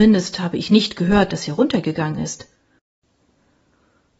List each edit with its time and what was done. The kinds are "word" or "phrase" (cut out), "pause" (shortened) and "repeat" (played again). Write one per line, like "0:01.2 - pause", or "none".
none